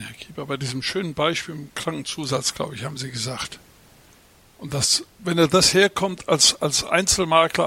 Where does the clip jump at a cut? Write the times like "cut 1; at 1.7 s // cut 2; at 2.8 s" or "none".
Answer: none